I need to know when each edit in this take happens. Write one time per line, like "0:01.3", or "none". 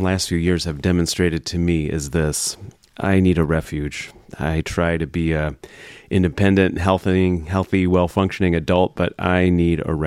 none